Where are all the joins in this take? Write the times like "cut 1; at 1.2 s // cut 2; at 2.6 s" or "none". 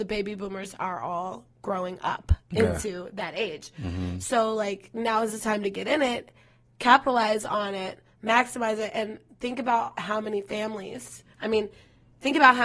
cut 1; at 1.5 s